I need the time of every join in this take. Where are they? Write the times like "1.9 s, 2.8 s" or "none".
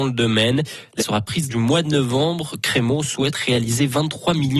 1.0 s, 1.5 s